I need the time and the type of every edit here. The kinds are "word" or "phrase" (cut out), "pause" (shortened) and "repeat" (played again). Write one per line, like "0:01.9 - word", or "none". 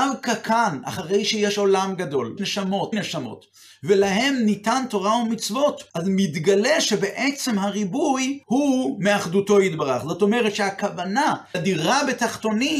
0:02.4 - word
0:02.9 - word
0:05.9 - pause
0:08.4 - pause
0:11.5 - word